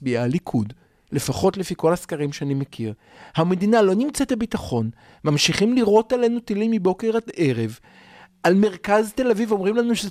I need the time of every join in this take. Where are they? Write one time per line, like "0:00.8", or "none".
none